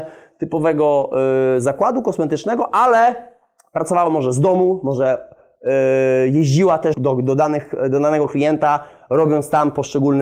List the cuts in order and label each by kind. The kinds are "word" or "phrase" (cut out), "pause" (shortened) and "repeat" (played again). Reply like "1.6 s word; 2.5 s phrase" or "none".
6.9 s word